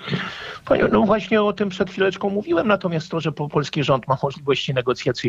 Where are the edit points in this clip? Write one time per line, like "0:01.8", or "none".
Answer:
none